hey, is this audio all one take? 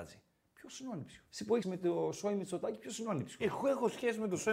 no; 2 cuts; at 1.3 s, 1.6 s

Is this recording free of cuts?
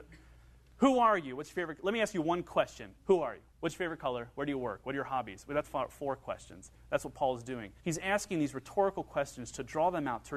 no; 4 cuts; at 3.0 s, 3.5 s, 5.6 s, 7.8 s

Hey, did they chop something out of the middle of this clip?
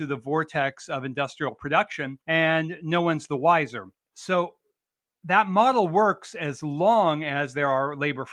yes; 2 cuts; at 2.2 s, 4.0 s

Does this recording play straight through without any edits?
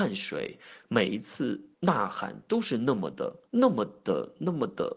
no; 2 cuts; at 1.7 s, 3.5 s

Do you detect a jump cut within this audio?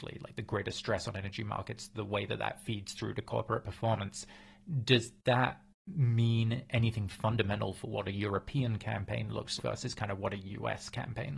yes; 1 cut; at 9.6 s

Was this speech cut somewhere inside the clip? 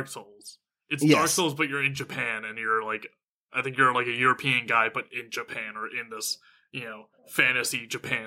no; 0 cuts

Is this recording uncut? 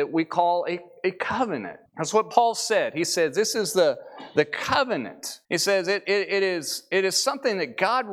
no; 2 cuts; at 1.9 s, 5.4 s

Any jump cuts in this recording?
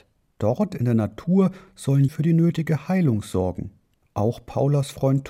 yes; 1 cut; at 2.1 s

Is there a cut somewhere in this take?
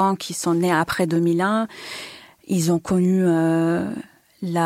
no; 0 cuts

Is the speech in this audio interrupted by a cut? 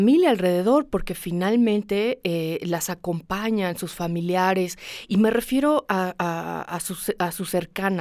no; 0 cuts

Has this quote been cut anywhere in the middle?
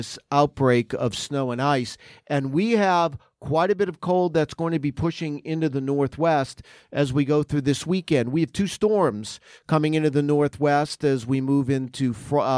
no; 0 cuts

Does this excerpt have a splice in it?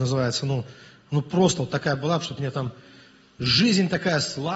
no; 0 cuts

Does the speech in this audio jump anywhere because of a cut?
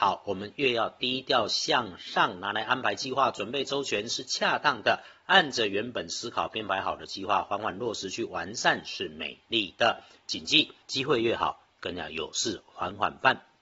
yes; 1 cut; at 10.8 s

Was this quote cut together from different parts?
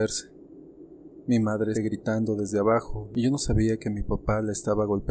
yes; 1 cut; at 1.7 s

